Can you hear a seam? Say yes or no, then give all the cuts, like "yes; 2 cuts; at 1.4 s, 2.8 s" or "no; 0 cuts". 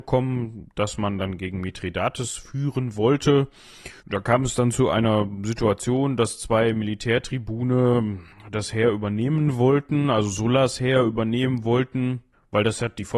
yes; 1 cut; at 4.0 s